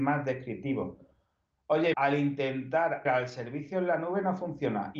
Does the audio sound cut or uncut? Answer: cut